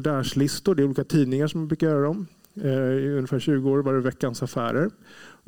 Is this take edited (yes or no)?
no